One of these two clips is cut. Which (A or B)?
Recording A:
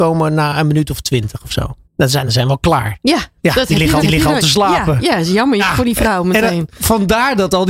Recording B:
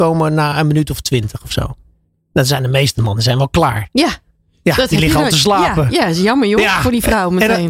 A